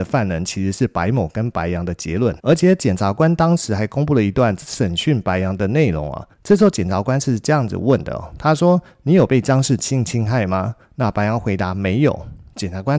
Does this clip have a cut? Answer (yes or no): yes